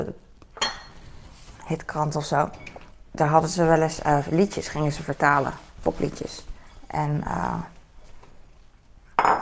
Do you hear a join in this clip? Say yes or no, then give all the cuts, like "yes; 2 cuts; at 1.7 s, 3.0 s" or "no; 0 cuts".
yes; 1 cut; at 5.7 s